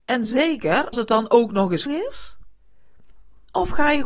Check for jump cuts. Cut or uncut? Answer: cut